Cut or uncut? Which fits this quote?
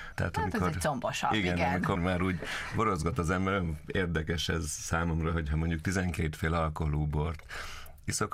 cut